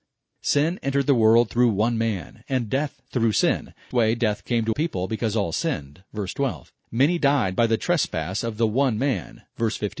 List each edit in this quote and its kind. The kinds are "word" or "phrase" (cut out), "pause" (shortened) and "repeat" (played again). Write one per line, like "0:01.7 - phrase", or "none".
0:03.9 - phrase
0:04.7 - word
0:06.8 - pause